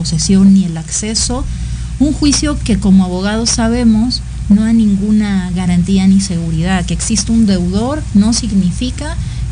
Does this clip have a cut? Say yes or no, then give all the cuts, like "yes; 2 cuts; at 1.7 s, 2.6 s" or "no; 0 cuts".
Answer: no; 0 cuts